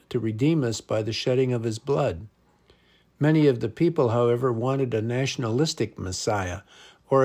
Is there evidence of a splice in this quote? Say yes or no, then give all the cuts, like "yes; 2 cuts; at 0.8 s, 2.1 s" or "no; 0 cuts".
no; 0 cuts